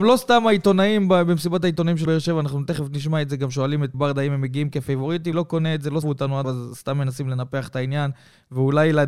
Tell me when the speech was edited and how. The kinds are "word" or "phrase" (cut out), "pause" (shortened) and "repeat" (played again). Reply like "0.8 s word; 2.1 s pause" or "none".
2.1 s word; 3.9 s word; 5.3 s word; 6.0 s word; 6.4 s word